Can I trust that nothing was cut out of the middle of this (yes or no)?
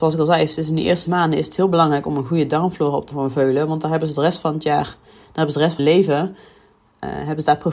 no